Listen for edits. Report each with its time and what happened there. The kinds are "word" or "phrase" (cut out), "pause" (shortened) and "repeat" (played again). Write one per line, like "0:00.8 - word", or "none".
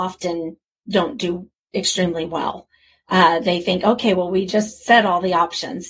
none